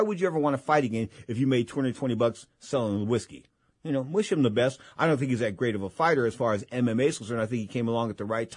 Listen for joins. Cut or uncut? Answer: uncut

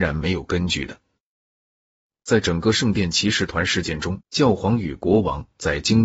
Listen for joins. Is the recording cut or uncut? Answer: cut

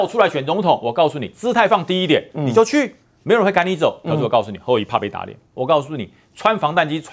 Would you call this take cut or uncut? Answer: cut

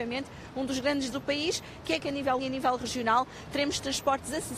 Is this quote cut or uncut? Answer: cut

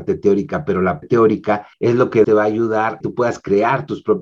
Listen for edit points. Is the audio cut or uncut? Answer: cut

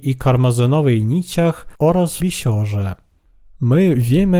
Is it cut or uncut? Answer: cut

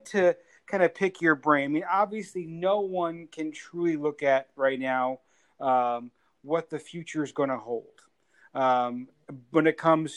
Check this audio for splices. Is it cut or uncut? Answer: uncut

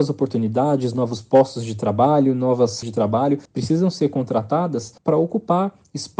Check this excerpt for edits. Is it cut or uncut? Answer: cut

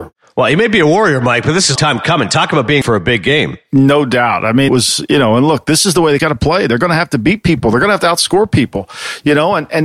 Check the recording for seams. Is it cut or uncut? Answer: cut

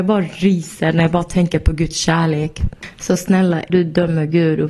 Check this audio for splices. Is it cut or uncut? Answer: cut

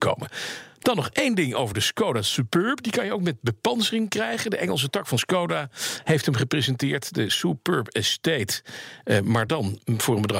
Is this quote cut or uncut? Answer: uncut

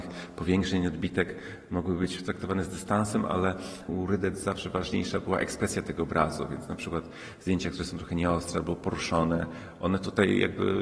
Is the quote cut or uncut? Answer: uncut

